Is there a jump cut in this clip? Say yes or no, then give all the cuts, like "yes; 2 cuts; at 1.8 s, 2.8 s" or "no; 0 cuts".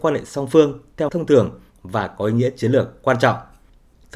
yes; 1 cut; at 1.1 s